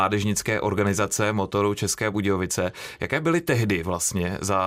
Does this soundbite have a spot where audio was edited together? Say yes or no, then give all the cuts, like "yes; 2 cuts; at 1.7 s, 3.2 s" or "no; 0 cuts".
no; 0 cuts